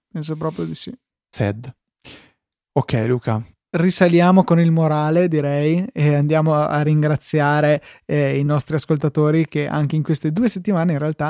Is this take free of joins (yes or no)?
yes